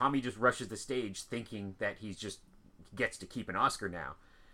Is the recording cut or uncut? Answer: uncut